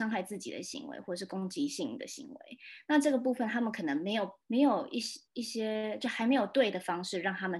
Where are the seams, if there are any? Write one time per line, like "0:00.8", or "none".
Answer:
0:04.4
0:05.3